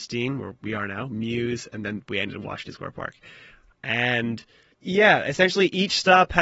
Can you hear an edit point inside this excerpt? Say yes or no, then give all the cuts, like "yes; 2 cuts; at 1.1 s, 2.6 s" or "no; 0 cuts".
no; 0 cuts